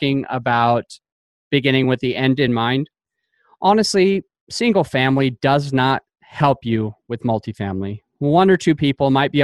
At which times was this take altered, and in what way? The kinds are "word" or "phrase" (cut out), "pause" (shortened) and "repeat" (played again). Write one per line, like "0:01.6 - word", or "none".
none